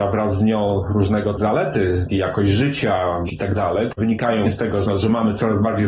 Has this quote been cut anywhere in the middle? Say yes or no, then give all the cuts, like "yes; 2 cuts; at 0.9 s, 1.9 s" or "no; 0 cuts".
yes; 6 cuts; at 1.4 s, 2.1 s, 3.3 s, 4.0 s, 4.4 s, 4.8 s